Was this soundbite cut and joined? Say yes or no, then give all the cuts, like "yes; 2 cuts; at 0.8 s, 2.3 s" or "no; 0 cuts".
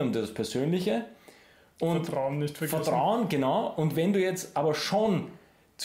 no; 0 cuts